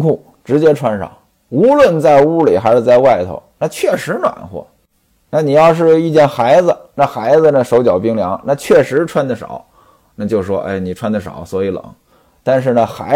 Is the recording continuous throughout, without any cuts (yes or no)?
yes